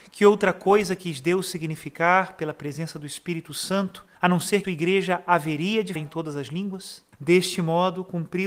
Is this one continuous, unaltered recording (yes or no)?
no